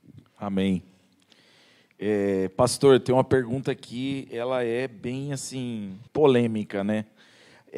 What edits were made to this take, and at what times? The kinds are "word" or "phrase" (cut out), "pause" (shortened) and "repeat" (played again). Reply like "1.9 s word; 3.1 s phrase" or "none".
6.1 s pause